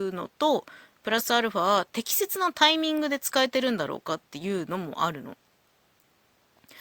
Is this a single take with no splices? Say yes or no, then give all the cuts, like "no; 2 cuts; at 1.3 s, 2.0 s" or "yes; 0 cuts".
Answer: yes; 0 cuts